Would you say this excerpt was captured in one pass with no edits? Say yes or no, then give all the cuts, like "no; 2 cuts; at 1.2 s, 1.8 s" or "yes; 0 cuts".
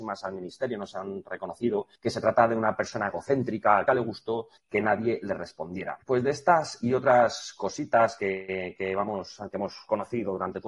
no; 4 cuts; at 2.0 s, 3.9 s, 4.6 s, 6.0 s